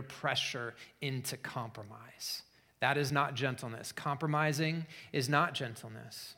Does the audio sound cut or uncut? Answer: uncut